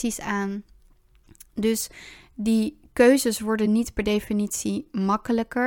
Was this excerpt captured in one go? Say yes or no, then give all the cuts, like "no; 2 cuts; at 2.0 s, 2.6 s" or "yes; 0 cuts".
yes; 0 cuts